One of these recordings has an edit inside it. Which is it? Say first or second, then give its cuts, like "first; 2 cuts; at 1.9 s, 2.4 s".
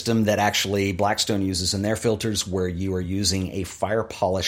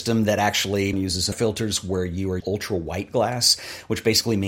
second; 3 cuts; at 0.9 s, 1.3 s, 2.4 s